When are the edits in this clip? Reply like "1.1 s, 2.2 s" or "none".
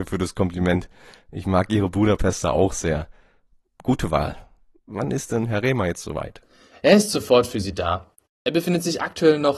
none